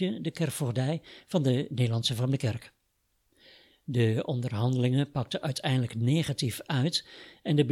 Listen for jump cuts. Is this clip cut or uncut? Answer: uncut